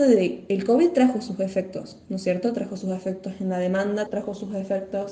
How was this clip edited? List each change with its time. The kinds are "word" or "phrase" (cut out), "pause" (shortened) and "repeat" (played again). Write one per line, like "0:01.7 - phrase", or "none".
0:04.1 - word